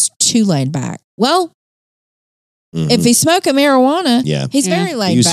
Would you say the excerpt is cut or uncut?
uncut